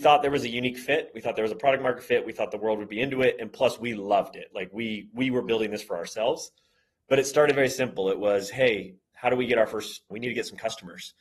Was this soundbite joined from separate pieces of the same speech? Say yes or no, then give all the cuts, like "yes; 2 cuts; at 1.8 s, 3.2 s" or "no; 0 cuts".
no; 0 cuts